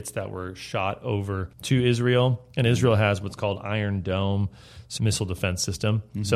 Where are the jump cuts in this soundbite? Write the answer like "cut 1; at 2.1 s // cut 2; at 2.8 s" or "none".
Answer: cut 1; at 1.5 s // cut 2; at 5.0 s